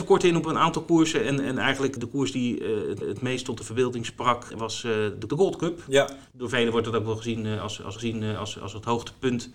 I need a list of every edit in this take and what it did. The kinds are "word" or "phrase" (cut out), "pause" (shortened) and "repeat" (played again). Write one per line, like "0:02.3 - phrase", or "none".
0:02.0 - word
0:03.0 - repeat
0:04.5 - word
0:05.3 - phrase
0:06.3 - pause
0:08.0 - repeat